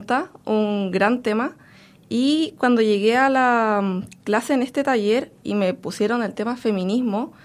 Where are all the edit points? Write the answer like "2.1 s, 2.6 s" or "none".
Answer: none